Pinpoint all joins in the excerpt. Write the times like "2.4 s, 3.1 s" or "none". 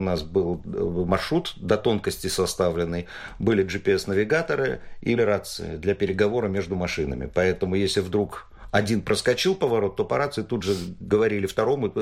5.2 s